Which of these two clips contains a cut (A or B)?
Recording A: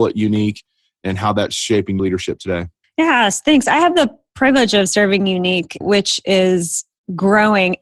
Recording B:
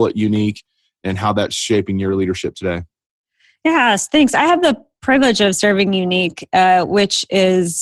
A